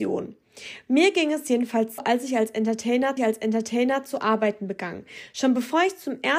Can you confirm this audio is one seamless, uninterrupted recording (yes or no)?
no